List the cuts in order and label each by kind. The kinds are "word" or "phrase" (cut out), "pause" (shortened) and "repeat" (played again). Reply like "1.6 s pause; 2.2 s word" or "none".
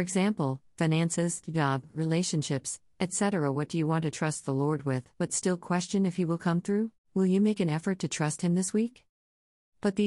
5.1 s pause; 7.0 s pause